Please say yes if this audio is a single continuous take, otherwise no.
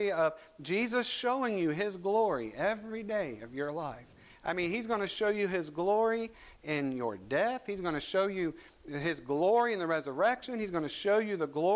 yes